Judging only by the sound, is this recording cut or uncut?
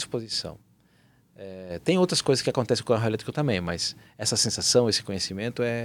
uncut